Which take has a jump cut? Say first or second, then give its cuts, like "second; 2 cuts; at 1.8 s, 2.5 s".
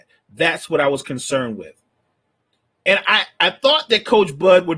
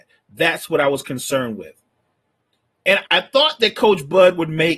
second; 1 cut; at 3.0 s